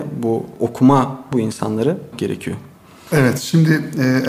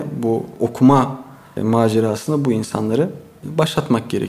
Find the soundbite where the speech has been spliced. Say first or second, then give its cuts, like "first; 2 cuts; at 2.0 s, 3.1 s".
first; 2 cuts; at 1.3 s, 2.1 s